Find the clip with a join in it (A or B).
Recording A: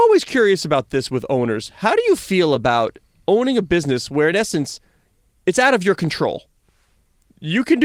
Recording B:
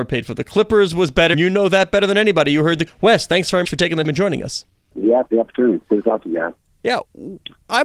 B